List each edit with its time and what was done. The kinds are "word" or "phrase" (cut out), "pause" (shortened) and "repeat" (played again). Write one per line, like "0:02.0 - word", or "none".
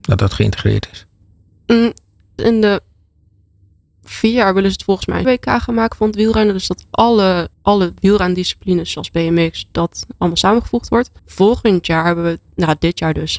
0:02.4 - word
0:05.2 - word
0:07.5 - pause
0:11.2 - pause